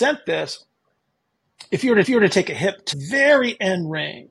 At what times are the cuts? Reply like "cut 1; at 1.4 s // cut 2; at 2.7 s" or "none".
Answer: cut 1; at 2.0 s // cut 2; at 2.9 s